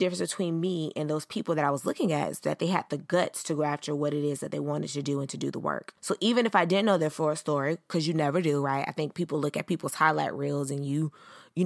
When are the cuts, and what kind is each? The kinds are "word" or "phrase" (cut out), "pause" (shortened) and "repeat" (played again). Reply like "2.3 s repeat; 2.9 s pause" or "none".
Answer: 6.0 s pause